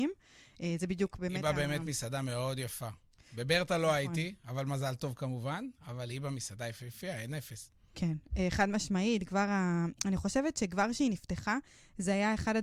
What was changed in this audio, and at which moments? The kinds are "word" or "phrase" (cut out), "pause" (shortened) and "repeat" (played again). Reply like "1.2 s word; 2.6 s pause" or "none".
none